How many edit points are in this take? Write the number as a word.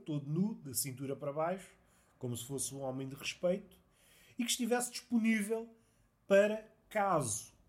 zero